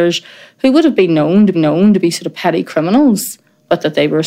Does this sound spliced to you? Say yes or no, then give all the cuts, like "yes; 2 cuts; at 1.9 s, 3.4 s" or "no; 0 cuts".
yes; 1 cut; at 1.5 s